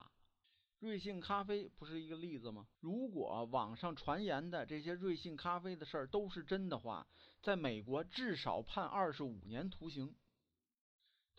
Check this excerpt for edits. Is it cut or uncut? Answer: cut